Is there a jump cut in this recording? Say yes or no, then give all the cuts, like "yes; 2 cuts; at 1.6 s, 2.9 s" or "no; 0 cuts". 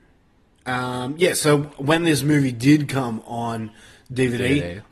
no; 0 cuts